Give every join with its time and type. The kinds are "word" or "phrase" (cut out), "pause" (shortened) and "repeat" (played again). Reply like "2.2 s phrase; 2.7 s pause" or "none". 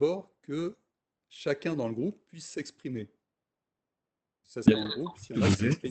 4.7 s phrase